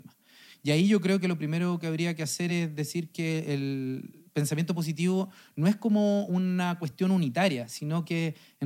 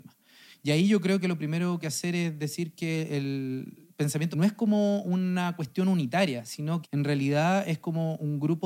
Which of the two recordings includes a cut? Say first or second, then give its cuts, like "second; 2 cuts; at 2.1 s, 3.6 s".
second; 3 cuts; at 1.8 s, 4.3 s, 6.8 s